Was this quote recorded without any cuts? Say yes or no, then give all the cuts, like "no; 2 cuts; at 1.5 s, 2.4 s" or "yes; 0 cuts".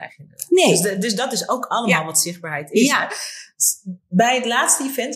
yes; 0 cuts